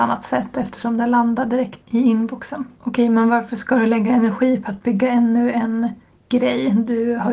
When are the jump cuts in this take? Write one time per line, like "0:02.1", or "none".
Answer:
0:02.8